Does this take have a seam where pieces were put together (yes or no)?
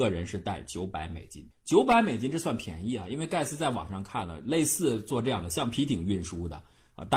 yes